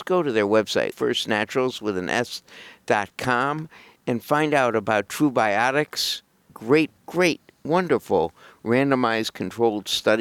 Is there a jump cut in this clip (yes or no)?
yes